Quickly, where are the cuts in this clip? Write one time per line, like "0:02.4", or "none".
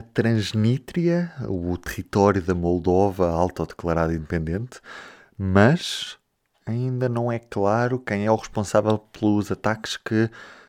none